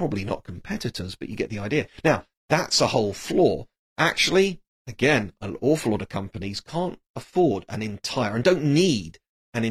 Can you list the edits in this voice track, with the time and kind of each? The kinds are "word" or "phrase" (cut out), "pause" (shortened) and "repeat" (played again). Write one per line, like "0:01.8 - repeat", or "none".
none